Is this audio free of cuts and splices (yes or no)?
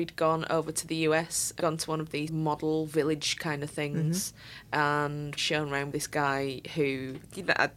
no